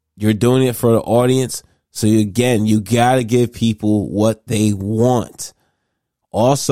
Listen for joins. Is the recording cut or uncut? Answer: uncut